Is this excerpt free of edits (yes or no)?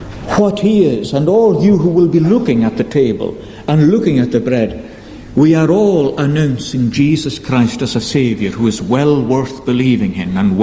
yes